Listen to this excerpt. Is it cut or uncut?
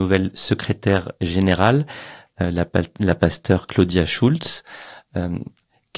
uncut